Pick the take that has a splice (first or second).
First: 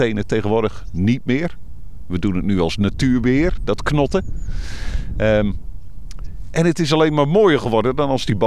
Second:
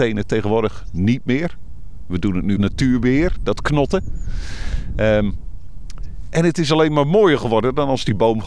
second